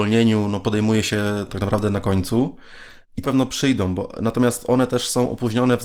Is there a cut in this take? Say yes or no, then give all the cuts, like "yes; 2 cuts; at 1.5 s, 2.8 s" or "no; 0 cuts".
yes; 1 cut; at 3.2 s